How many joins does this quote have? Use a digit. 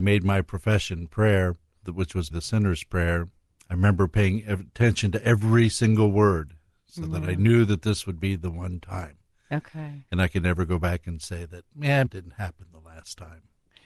3